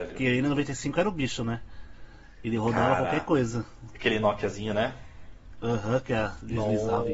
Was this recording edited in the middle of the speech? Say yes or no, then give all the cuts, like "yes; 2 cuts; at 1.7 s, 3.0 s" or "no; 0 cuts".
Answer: no; 0 cuts